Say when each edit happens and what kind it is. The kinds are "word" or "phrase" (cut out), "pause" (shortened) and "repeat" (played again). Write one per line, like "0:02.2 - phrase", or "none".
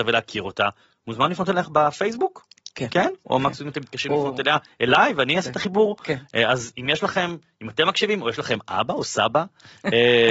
none